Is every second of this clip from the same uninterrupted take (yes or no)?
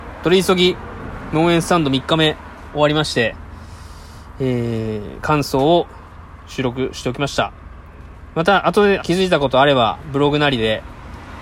no